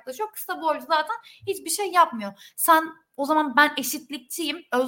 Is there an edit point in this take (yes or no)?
no